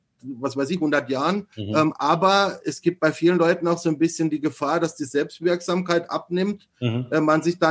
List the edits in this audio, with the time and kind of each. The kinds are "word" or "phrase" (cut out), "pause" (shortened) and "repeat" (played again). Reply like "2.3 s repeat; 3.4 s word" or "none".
1.5 s pause